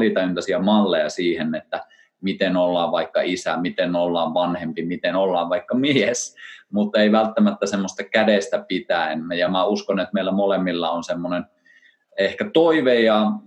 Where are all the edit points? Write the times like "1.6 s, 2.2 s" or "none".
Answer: none